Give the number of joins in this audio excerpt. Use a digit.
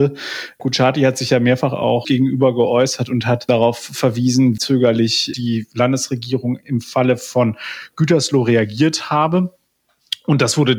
2